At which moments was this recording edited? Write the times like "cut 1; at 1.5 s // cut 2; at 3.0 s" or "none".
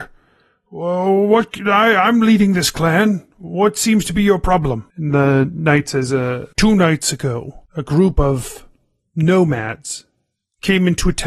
cut 1; at 4.9 s // cut 2; at 6.5 s // cut 3; at 7.6 s